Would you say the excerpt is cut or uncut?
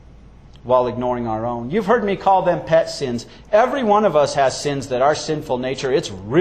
uncut